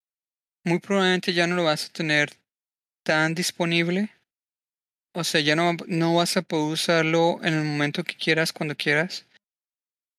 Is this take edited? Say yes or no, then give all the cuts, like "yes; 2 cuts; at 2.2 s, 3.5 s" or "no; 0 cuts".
no; 0 cuts